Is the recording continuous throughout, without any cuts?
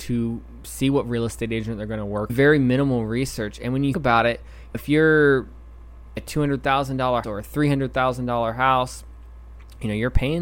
no; 5 cuts; at 2.3 s, 3.9 s, 4.7 s, 6.2 s, 7.2 s

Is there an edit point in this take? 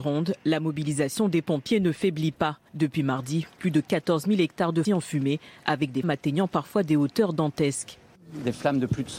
yes; 3 cuts; at 2.7 s, 4.8 s, 6.0 s

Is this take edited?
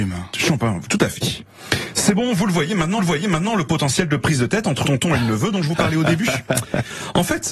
yes; 2 cuts; at 3.0 s, 4.8 s

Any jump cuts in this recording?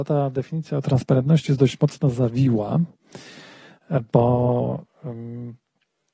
no; 0 cuts

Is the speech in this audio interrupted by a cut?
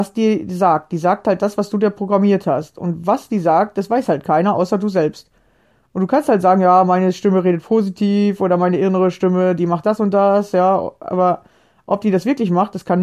no; 0 cuts

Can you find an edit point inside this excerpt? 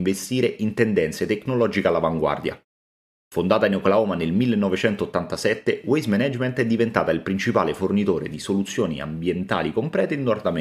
no; 0 cuts

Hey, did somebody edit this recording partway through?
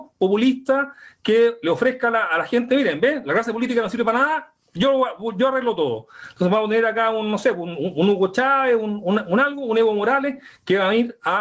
no; 0 cuts

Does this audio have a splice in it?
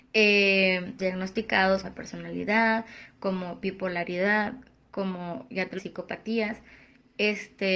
yes; 3 cuts; at 1.0 s, 1.8 s, 5.8 s

